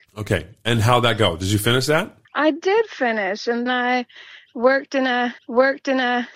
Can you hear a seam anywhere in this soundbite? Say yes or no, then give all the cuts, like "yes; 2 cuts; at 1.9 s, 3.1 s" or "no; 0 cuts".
yes; 3 cuts; at 2.2 s, 3.7 s, 5.4 s